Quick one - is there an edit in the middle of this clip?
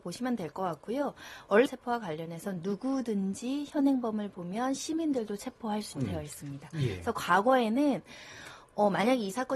yes; 2 cuts; at 1.7 s, 5.9 s

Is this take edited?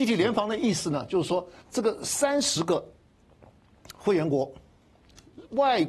yes; 1 cut; at 1.6 s

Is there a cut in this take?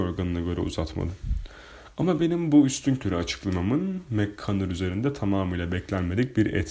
no; 0 cuts

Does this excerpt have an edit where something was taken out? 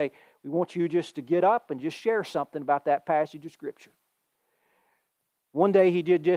no; 0 cuts

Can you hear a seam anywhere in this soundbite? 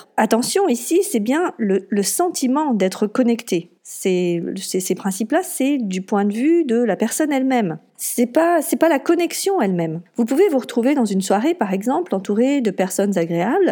yes; 1 cut; at 3.8 s

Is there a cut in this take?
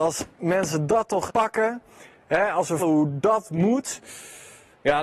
yes; 2 cuts; at 1.3 s, 2.8 s

